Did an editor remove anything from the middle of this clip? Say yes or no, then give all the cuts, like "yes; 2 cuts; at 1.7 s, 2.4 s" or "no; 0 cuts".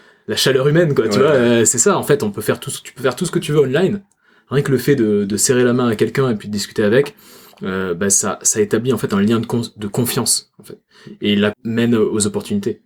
yes; 1 cut; at 11.5 s